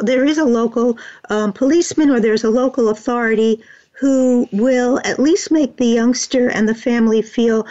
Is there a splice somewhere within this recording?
no; 0 cuts

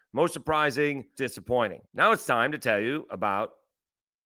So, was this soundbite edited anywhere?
yes; 2 cuts; at 1.1 s, 1.8 s

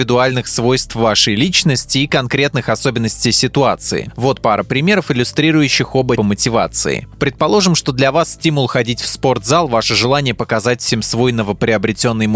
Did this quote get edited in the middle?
yes; 1 cut; at 6.2 s

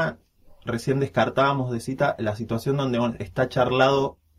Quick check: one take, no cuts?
yes; 0 cuts

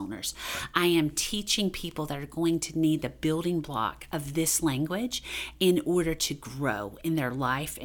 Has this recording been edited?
no; 0 cuts

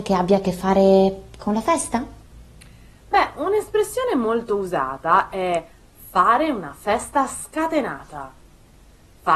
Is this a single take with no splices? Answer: yes; 0 cuts

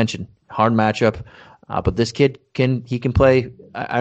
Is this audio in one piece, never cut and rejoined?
yes; 0 cuts

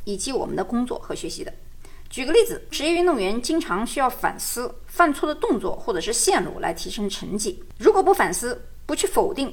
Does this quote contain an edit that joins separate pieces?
yes; 1 cut; at 2.7 s

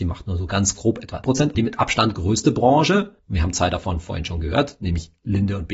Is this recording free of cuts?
no; 3 cuts; at 1.2 s, 1.5 s, 3.2 s

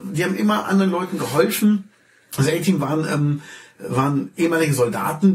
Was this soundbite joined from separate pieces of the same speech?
no; 0 cuts

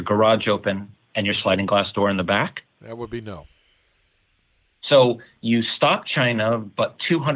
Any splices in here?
no; 0 cuts

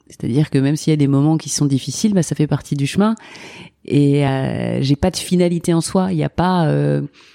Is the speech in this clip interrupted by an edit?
no; 0 cuts

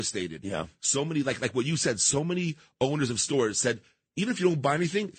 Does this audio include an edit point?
no; 0 cuts

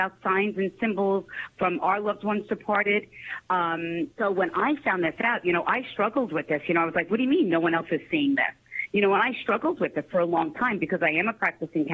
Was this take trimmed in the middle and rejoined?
yes; 1 cut; at 4.1 s

